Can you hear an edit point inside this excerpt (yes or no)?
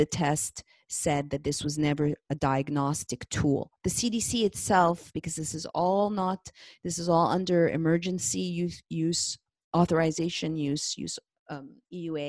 no